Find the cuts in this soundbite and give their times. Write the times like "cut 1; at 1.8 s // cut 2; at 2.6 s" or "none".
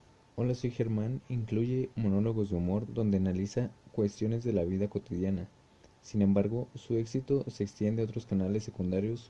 none